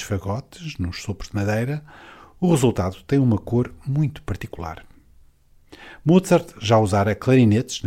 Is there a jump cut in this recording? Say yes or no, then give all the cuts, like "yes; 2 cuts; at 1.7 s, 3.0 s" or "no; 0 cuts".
no; 0 cuts